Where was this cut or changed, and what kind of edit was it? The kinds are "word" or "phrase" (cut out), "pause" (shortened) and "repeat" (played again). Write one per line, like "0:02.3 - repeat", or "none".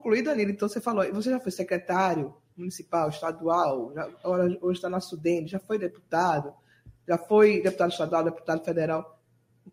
none

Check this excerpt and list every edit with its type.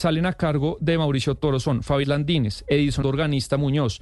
0:02.0 - word
0:03.0 - word

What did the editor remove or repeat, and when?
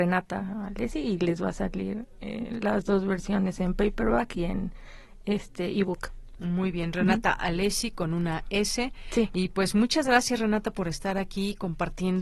none

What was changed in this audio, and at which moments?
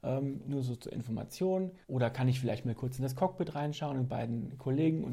0:01.8 - pause

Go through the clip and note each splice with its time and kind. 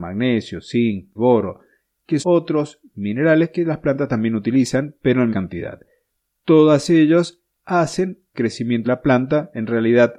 0:01.2 - word
0:02.2 - word
0:05.3 - word
0:08.3 - word
0:08.8 - word

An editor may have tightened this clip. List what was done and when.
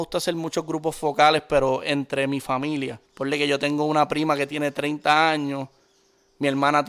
0:03.0 - pause

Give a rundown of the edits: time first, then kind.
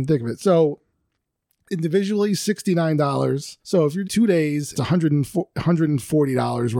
0:03.6 - pause
0:04.0 - word
0:04.7 - word

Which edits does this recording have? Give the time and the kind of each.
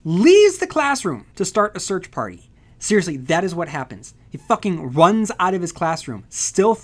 0:01.3 - pause

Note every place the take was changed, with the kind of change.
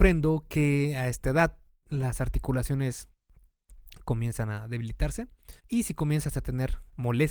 0:05.6 - pause

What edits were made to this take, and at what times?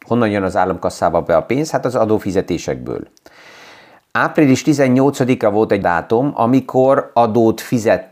0:05.8 - word

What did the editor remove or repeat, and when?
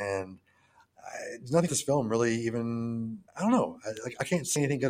0:01.7 - word
0:03.3 - pause

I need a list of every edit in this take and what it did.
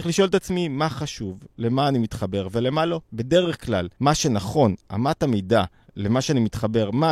0:03.0 - pause
0:03.9 - pause
0:05.8 - pause

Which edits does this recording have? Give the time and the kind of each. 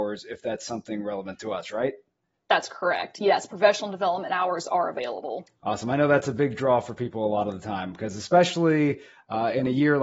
none

